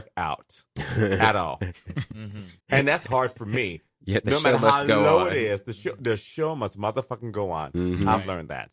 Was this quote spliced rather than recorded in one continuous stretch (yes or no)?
yes